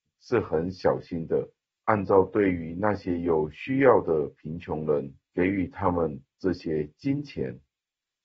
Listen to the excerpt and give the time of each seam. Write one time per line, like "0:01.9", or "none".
none